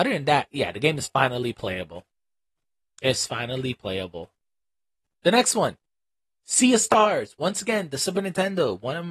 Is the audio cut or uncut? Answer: uncut